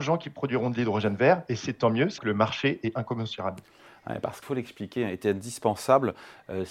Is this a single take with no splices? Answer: no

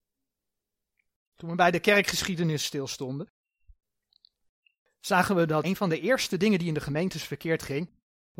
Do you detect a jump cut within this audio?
yes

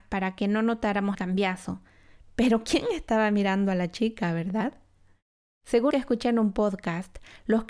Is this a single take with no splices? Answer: no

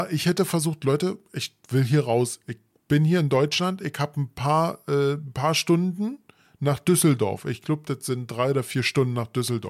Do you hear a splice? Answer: no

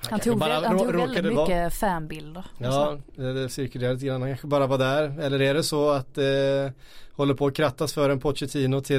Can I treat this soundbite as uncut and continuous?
yes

